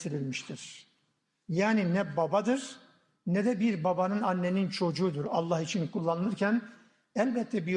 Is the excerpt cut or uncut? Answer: uncut